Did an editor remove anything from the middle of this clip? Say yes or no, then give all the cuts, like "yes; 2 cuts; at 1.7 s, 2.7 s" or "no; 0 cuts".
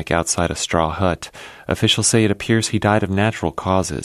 no; 0 cuts